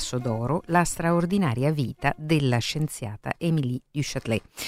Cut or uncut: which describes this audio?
uncut